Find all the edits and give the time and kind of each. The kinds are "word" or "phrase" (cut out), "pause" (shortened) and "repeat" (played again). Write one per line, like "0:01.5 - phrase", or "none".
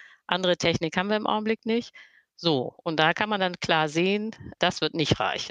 none